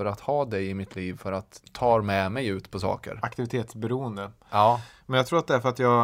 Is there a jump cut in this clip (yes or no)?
yes